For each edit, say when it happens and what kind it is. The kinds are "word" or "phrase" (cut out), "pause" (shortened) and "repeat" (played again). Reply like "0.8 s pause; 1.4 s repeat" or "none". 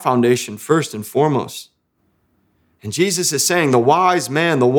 none